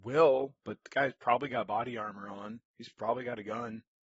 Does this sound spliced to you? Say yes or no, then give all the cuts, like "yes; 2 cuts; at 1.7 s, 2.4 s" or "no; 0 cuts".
no; 0 cuts